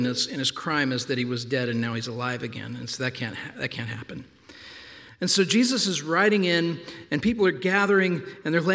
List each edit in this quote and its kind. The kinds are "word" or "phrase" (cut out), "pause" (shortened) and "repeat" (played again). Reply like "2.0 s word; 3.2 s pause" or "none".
none